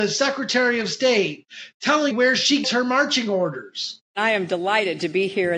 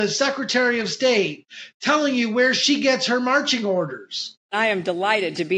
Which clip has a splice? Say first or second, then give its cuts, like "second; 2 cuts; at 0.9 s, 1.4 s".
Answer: first; 2 cuts; at 2.1 s, 2.6 s